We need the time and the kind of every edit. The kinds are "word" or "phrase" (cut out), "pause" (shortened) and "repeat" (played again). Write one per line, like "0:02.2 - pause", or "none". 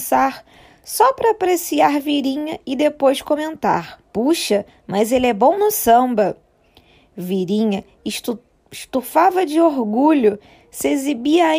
0:04.0 - pause
0:05.6 - word